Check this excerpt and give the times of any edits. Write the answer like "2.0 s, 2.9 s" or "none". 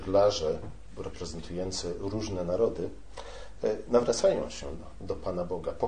none